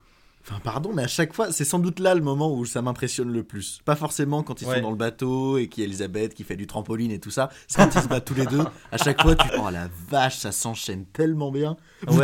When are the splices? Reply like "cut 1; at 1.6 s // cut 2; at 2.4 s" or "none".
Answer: cut 1; at 7.7 s // cut 2; at 9.5 s